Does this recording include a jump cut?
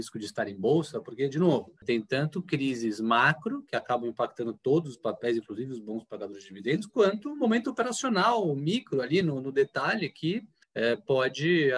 no; 0 cuts

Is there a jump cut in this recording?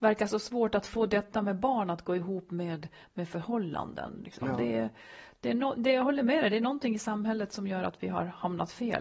no; 0 cuts

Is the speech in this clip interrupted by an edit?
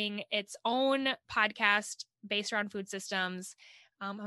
no; 0 cuts

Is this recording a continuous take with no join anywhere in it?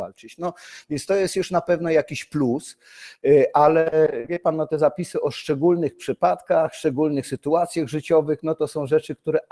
yes; 0 cuts

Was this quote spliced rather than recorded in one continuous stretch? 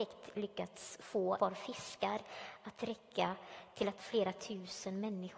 yes; 2 cuts; at 1.4 s, 4.0 s

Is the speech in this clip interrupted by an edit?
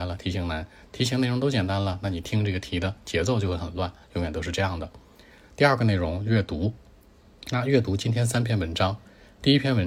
no; 0 cuts

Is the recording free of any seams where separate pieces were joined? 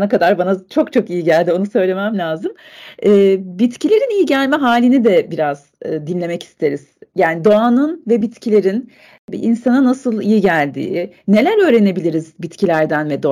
yes; 0 cuts

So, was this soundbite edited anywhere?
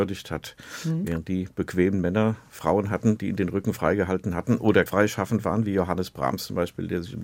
yes; 1 cut; at 4.9 s

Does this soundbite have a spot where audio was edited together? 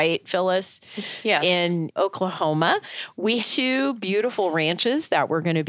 yes; 2 cuts; at 2.0 s, 3.4 s

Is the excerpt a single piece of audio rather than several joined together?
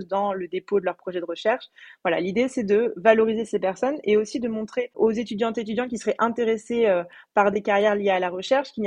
yes; 0 cuts

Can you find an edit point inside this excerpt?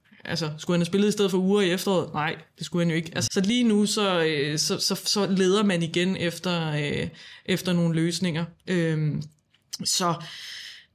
yes; 1 cut; at 3.3 s

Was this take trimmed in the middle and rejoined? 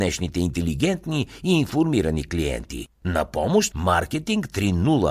yes; 2 cuts; at 3.0 s, 3.7 s

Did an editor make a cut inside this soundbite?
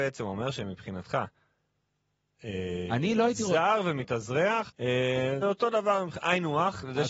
yes; 2 cuts; at 4.7 s, 5.4 s

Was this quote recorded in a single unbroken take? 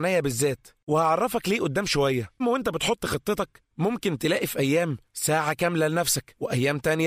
no; 1 cut; at 2.4 s

